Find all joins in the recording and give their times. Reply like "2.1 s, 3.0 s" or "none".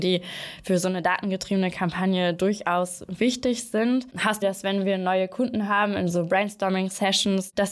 4.4 s